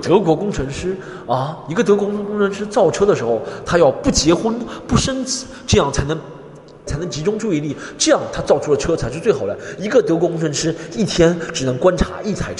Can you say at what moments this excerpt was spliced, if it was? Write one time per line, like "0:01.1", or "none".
0:06.9